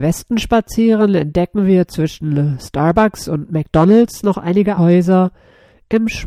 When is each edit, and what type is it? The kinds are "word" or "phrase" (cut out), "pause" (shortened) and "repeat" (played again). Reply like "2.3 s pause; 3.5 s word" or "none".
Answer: 4.8 s word